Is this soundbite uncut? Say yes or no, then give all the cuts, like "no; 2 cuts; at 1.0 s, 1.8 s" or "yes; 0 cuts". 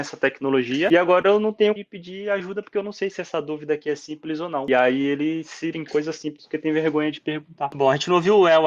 no; 2 cuts; at 1.8 s, 5.7 s